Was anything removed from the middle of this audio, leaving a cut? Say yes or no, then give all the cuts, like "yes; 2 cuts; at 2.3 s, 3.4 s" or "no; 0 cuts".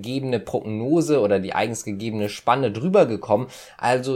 no; 0 cuts